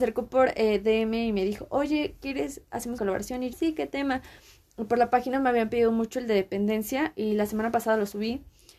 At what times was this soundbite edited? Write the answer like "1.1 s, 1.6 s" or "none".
3.0 s, 3.5 s